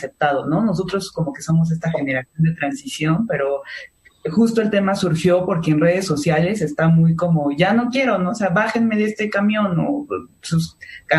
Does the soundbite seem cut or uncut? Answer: uncut